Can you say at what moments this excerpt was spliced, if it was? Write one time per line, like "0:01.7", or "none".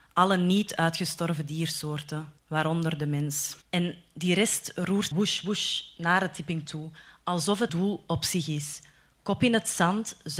0:02.4
0:03.6
0:05.1
0:06.7
0:07.7